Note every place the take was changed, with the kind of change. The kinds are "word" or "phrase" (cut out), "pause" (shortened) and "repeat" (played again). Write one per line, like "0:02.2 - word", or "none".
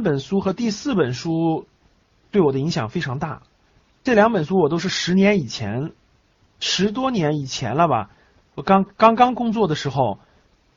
none